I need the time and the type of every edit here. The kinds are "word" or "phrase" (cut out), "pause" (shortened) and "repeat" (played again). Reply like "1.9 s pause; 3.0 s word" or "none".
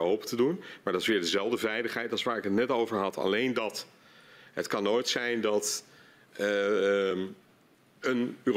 none